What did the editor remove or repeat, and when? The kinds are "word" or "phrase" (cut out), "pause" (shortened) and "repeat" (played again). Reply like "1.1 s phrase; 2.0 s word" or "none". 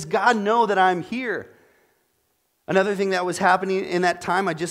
none